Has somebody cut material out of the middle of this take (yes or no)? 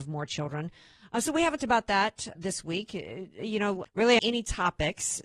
yes